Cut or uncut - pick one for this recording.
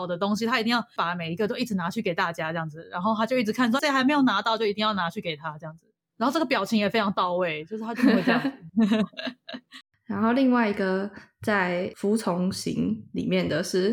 cut